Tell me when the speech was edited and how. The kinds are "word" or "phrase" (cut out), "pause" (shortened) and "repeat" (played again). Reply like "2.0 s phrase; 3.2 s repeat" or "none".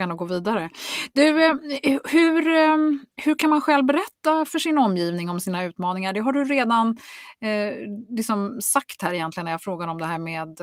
none